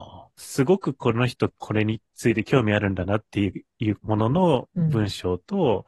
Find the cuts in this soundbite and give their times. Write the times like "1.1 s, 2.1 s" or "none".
4.0 s